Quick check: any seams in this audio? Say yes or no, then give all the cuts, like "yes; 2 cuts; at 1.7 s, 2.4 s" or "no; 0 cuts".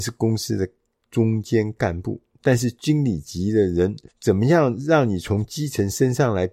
yes; 1 cut; at 4.1 s